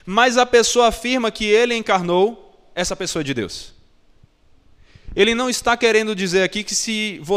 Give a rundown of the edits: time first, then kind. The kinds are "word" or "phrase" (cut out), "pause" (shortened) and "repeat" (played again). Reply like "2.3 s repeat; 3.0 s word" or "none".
none